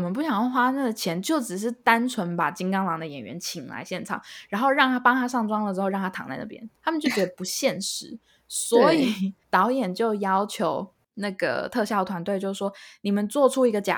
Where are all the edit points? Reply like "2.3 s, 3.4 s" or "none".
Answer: 6.8 s, 9.4 s